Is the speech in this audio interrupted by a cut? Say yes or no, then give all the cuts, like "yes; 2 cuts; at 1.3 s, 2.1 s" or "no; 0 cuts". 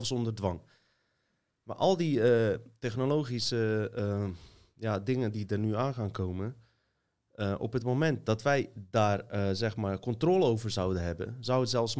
no; 0 cuts